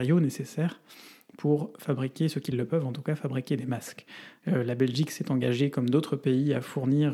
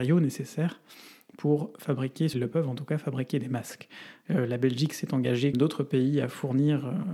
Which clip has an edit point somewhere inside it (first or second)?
second